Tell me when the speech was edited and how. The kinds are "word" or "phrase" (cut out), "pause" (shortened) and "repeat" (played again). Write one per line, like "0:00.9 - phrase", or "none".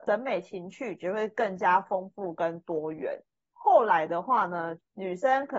none